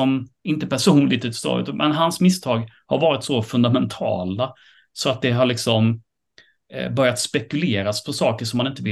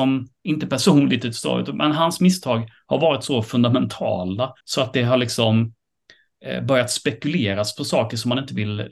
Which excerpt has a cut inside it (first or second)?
second